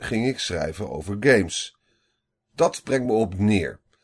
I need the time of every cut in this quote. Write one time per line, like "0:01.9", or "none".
none

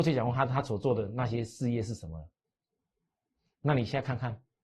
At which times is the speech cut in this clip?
none

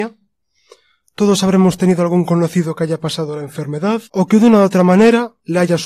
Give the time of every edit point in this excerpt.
0:04.1

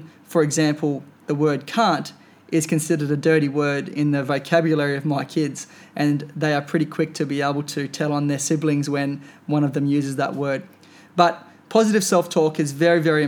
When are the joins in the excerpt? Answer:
none

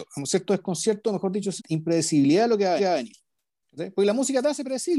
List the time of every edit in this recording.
0:01.6
0:02.8

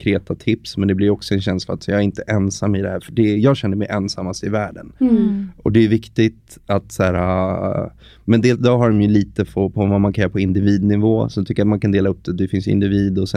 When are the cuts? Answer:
none

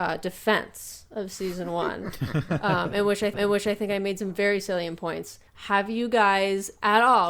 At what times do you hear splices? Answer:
0:03.3
0:05.5

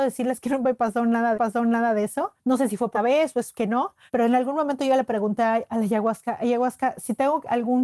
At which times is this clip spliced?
0:01.3
0:02.4
0:02.9
0:04.1

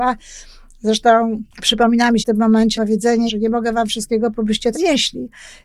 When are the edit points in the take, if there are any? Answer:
0:01.5
0:02.2
0:02.7
0:03.3
0:04.3
0:04.7

